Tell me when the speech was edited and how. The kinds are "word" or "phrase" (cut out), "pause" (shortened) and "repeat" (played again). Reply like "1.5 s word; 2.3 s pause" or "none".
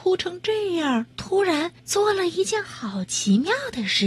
1.1 s pause; 1.8 s pause